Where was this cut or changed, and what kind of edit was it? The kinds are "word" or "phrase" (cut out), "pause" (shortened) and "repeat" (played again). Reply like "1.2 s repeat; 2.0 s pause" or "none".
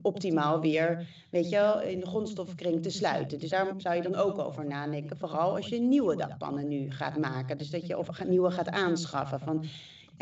3.5 s word